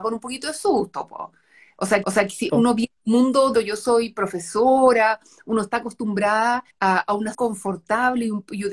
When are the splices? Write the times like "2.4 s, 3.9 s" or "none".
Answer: 2.0 s, 2.5 s, 3.0 s, 3.5 s, 6.7 s, 7.3 s